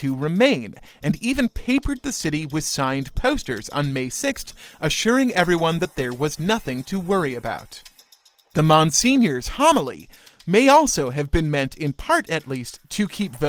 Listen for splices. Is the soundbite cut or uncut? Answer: uncut